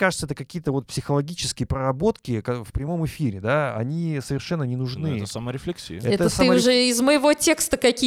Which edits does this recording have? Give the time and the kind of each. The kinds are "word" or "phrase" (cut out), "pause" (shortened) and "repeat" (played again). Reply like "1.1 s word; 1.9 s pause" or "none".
none